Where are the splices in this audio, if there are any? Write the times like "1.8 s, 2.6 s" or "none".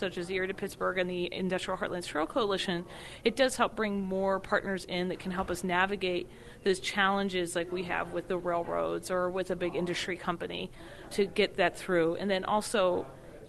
11.1 s